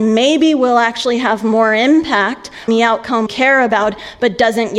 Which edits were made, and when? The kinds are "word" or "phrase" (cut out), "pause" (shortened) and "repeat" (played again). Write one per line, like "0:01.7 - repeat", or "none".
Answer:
0:02.7 - word
0:03.3 - word